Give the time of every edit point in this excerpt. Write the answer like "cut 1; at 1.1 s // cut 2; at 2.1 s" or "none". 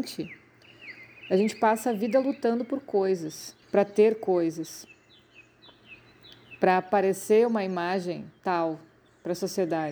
cut 1; at 3.6 s